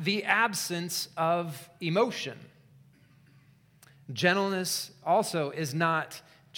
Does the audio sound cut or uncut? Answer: uncut